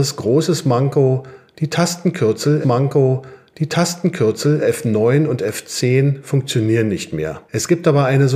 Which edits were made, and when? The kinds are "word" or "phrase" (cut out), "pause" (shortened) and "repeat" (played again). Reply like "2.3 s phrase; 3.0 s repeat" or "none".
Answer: 2.6 s repeat; 7.5 s pause